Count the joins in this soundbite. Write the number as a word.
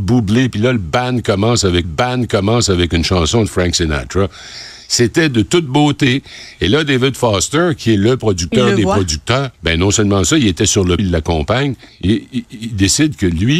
four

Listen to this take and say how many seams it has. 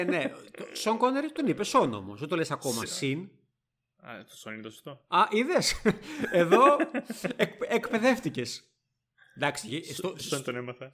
zero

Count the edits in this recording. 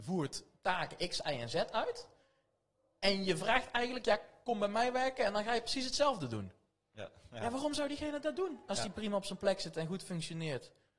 zero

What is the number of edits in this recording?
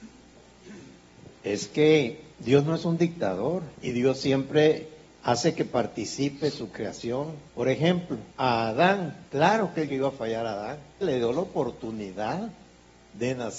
eight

